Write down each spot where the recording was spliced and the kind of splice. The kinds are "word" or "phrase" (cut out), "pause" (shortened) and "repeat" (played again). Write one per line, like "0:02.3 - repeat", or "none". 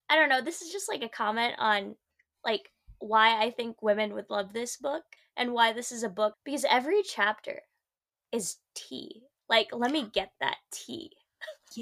0:05.2 - pause
0:06.3 - phrase